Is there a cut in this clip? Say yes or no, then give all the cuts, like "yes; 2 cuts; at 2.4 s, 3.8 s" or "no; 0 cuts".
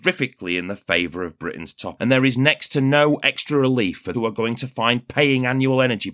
yes; 2 cuts; at 2.0 s, 4.1 s